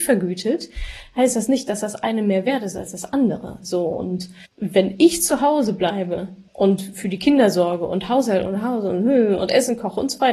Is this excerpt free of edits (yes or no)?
no